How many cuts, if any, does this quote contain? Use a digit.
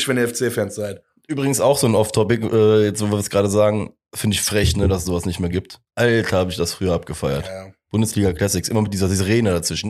1